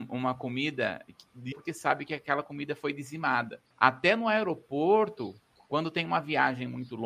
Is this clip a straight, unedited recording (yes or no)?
no